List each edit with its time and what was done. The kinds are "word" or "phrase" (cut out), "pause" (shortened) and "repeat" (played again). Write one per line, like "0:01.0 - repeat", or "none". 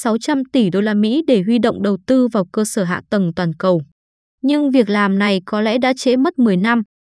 none